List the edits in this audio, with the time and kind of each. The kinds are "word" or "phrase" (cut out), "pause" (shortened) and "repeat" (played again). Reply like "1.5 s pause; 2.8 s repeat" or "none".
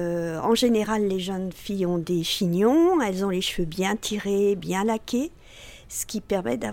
none